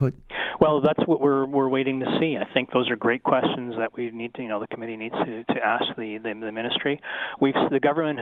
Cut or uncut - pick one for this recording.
uncut